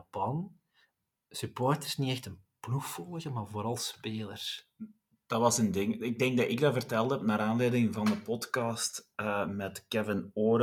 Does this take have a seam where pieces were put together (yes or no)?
no